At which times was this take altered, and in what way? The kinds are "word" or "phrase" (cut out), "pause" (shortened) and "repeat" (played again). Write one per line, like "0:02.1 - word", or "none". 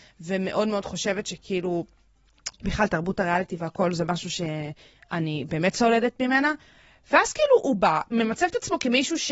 none